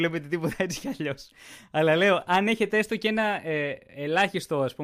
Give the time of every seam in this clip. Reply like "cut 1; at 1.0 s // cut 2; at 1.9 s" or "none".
none